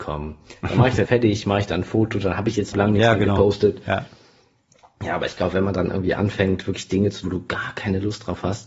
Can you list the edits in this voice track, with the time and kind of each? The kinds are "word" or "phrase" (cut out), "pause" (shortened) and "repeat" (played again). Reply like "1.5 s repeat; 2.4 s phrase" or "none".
1.1 s word; 2.7 s phrase; 7.2 s word